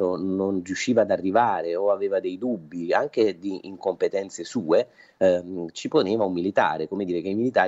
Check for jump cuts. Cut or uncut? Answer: uncut